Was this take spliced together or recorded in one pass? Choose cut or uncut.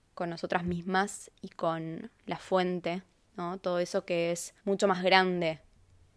cut